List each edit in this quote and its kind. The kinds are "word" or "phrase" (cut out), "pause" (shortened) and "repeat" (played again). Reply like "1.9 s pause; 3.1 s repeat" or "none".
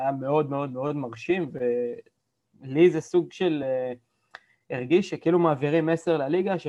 none